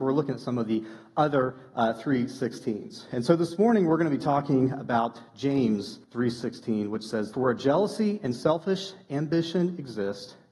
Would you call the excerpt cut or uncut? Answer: cut